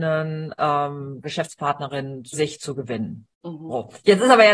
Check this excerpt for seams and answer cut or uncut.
cut